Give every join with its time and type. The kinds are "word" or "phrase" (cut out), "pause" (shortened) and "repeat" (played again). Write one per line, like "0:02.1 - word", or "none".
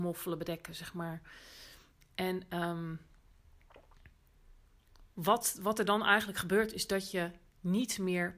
none